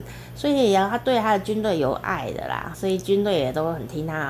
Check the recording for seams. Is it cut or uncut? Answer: cut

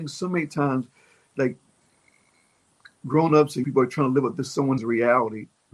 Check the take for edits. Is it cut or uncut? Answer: cut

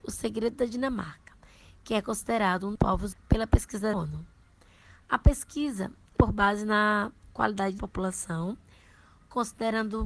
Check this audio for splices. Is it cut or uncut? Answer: cut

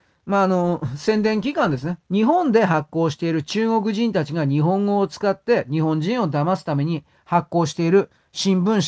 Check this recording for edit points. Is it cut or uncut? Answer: cut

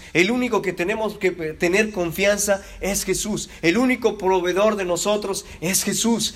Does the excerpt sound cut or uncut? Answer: uncut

